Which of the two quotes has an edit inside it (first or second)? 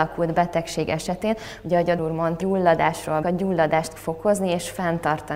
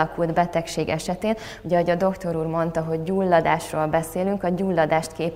first